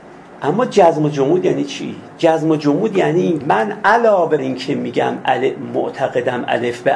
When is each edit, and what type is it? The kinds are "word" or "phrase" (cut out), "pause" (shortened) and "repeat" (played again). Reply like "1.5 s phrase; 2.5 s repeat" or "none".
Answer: 3.4 s word; 4.4 s word